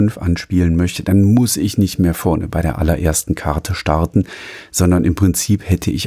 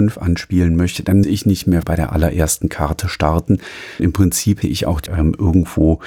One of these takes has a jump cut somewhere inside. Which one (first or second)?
second